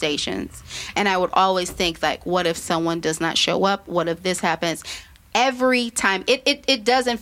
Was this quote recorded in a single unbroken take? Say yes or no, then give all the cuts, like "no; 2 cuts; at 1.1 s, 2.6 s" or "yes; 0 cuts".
yes; 0 cuts